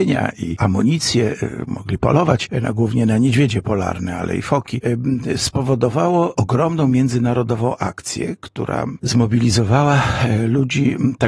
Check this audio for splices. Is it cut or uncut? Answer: uncut